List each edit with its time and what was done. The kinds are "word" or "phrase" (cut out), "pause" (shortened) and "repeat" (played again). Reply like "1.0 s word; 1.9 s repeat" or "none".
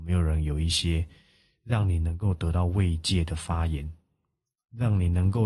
none